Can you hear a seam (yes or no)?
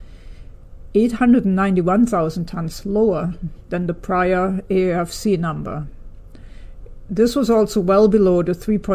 no